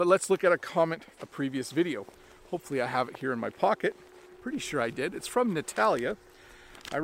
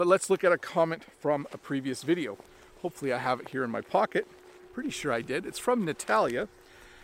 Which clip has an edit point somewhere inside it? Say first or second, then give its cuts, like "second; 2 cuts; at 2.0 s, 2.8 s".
first; 1 cut; at 1.2 s